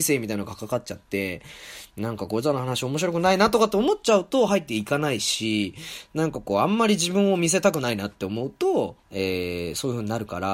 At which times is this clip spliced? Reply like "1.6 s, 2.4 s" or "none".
9.0 s